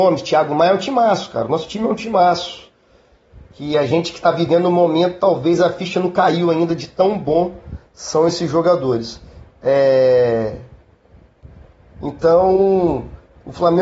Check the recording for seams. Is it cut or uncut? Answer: uncut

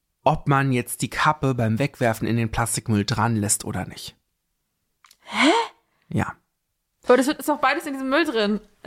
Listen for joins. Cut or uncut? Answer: uncut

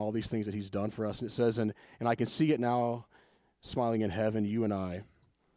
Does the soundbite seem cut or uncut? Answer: uncut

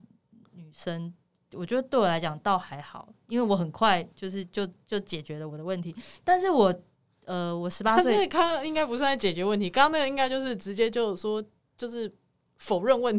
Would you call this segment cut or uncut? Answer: uncut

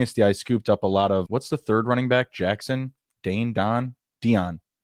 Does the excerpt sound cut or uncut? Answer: cut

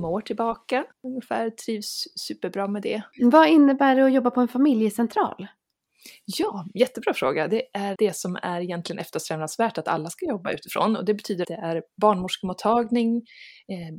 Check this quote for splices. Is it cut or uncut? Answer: cut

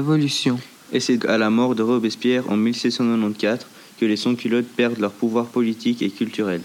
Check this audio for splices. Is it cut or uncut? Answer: cut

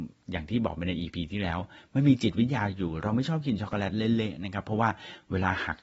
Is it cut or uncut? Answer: uncut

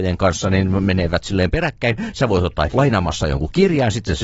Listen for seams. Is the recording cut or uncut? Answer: cut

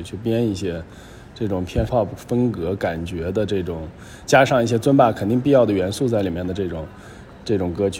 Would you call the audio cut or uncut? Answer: cut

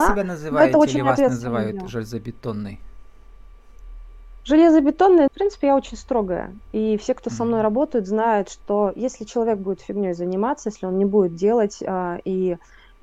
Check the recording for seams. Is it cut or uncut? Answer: cut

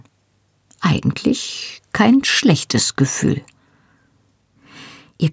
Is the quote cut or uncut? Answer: uncut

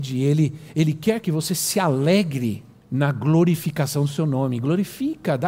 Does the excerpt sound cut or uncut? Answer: cut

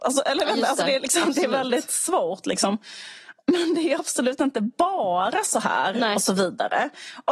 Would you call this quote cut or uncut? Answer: uncut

